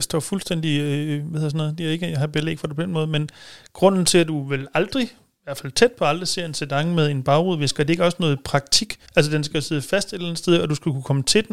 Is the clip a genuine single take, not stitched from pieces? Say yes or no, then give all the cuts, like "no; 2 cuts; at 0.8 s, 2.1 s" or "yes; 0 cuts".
no; 1 cut; at 9.1 s